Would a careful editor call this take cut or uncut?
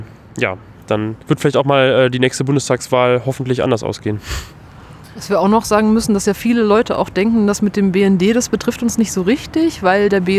cut